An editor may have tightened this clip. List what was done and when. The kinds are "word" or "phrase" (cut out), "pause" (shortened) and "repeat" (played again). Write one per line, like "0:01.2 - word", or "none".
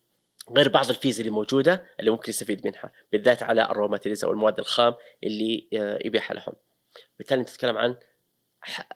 none